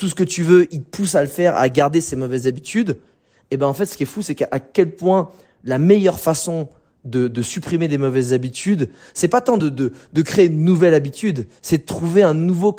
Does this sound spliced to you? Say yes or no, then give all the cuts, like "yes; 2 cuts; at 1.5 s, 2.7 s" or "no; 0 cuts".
no; 0 cuts